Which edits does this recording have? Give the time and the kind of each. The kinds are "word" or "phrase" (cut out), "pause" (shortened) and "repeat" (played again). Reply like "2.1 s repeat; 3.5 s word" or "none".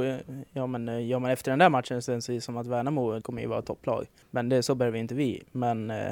3.2 s word; 4.2 s pause